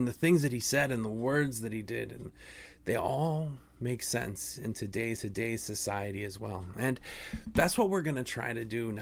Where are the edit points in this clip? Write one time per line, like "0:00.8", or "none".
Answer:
0:05.2

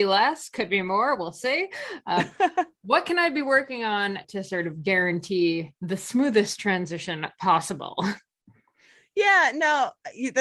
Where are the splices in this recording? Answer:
0:04.2

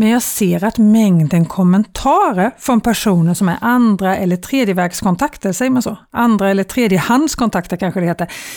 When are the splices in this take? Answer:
none

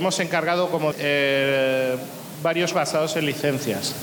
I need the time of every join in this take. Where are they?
0:00.9
0:02.7

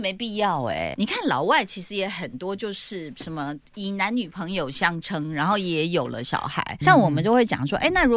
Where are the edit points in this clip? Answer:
0:00.9
0:06.8

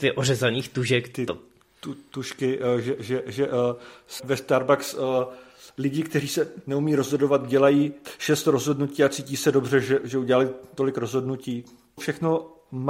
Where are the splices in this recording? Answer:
0:04.2
0:12.0

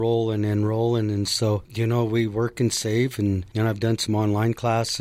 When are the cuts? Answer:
none

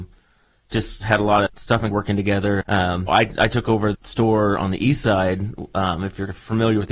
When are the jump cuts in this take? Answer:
0:01.5
0:01.9
0:02.6
0:03.1
0:03.9

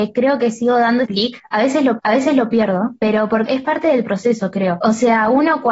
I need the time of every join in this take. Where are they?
0:01.1
0:02.0
0:03.5

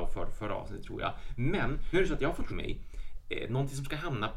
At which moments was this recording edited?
0:01.9
0:02.5

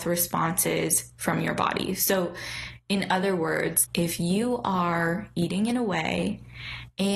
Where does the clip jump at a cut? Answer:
0:03.8

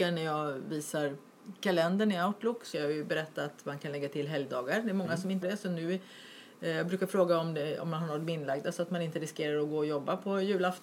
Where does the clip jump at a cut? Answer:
0:02.7
0:05.4

